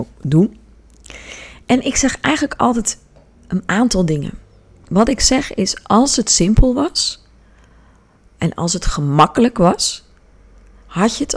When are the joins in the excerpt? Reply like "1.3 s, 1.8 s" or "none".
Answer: none